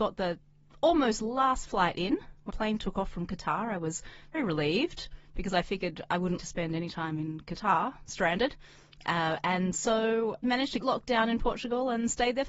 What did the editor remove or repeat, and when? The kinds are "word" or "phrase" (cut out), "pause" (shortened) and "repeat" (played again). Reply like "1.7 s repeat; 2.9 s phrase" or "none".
2.5 s word; 4.3 s word; 6.4 s word; 10.4 s word; 10.8 s phrase